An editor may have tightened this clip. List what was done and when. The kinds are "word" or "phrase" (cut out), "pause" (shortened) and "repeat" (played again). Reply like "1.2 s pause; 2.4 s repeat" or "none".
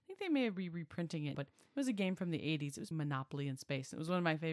1.3 s word; 2.9 s word